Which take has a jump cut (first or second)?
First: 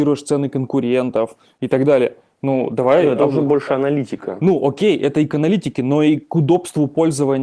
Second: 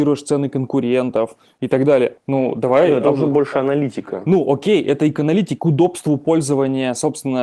second